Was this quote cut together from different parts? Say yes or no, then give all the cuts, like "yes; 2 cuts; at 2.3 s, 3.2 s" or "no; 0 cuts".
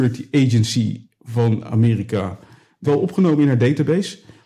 yes; 1 cut; at 2.8 s